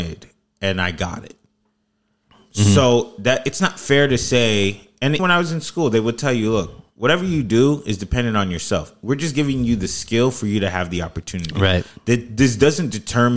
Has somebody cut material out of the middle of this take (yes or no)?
yes